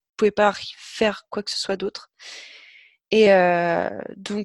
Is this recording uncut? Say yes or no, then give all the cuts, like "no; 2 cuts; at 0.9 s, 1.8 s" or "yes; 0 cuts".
yes; 0 cuts